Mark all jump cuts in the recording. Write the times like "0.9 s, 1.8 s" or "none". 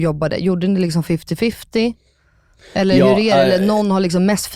none